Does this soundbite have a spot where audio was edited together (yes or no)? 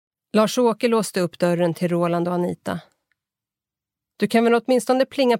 no